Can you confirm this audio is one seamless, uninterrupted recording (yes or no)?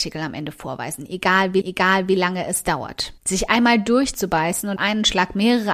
no